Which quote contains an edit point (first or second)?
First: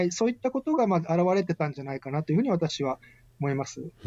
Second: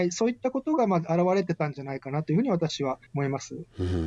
second